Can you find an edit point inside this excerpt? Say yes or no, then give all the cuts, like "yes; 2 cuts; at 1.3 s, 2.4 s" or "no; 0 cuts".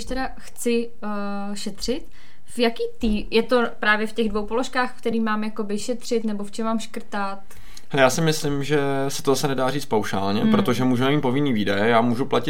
no; 0 cuts